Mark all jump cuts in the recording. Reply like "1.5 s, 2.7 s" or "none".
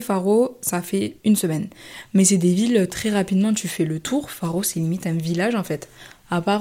1.2 s

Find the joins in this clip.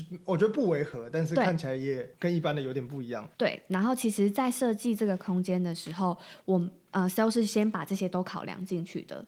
2.1 s, 3.3 s

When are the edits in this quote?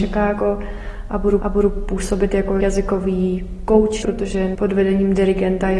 1.4 s, 2.6 s, 4.0 s, 4.5 s

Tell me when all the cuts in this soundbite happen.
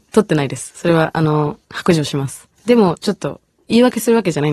1.6 s, 2.5 s

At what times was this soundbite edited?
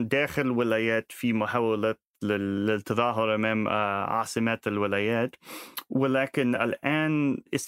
none

